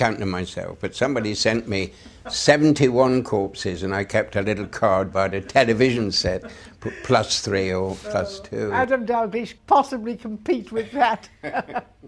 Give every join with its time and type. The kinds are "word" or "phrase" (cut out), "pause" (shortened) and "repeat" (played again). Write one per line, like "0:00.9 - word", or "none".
0:09.6 - word